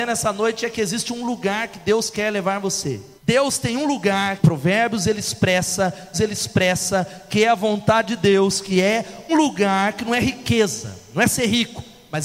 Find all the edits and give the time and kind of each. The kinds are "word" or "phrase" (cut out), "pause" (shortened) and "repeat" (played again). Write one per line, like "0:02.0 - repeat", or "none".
0:03.2 - pause
0:04.4 - word
0:06.1 - repeat
0:09.3 - word